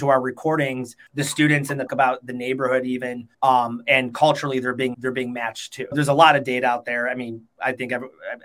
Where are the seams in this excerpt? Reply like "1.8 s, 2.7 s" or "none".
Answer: 1.1 s, 1.9 s, 3.3 s, 4.9 s, 5.9 s